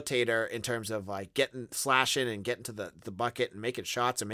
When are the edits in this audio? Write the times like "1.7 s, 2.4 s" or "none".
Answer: none